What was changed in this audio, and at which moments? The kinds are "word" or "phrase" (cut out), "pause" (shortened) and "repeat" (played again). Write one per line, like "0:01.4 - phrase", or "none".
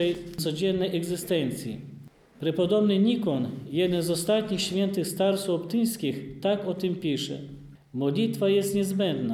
none